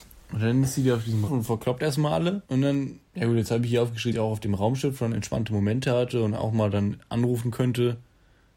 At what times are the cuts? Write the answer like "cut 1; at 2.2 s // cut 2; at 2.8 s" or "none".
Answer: cut 1; at 1.3 s // cut 2; at 2.4 s // cut 3; at 3.1 s // cut 4; at 4.1 s